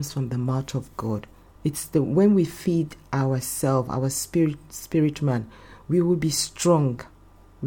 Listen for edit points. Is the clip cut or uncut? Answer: uncut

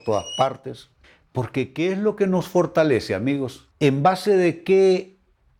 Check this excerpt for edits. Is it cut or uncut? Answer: cut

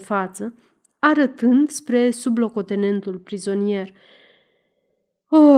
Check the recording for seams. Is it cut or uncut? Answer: uncut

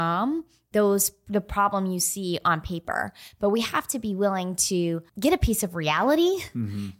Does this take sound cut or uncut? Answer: cut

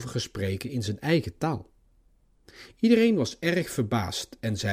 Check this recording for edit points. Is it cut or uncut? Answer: uncut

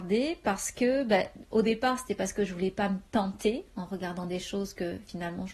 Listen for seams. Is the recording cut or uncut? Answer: uncut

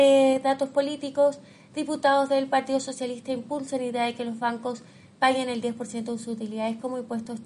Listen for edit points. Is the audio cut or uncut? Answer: uncut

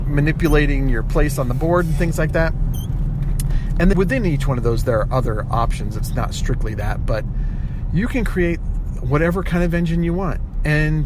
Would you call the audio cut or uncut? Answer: cut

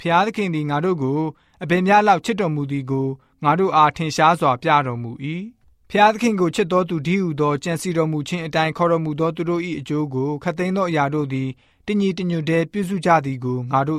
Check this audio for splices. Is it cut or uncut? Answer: uncut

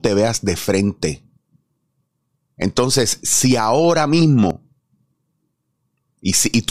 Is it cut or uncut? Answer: uncut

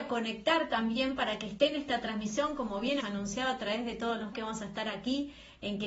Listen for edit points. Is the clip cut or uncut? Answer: cut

